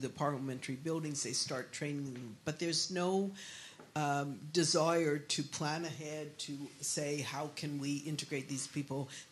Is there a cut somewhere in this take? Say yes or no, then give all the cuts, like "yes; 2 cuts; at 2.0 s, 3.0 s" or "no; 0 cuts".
no; 0 cuts